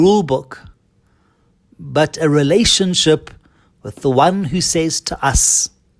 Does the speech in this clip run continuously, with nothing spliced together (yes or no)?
yes